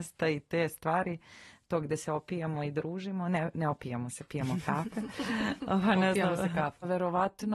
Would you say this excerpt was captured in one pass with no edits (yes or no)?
yes